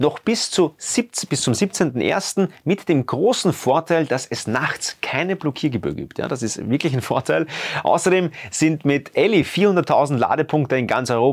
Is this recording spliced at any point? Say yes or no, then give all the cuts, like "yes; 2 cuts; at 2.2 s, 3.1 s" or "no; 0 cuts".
no; 0 cuts